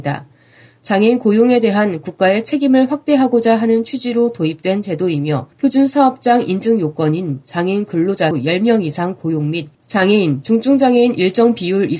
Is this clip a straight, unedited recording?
no; 3 cuts; at 5.5 s, 8.3 s, 9.7 s

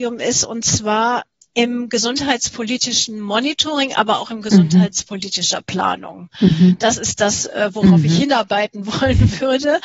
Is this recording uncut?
yes; 0 cuts

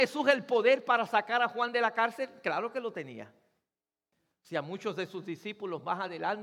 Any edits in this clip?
no; 0 cuts

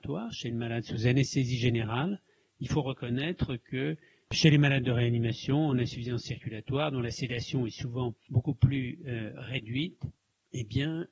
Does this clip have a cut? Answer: no; 0 cuts

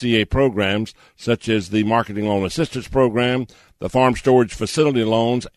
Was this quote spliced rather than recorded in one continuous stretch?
no; 0 cuts

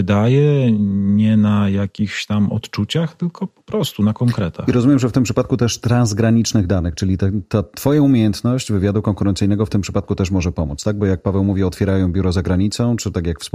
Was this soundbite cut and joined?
no; 0 cuts

